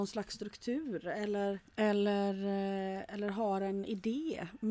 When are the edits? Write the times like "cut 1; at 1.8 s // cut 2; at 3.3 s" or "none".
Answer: cut 1; at 1.7 s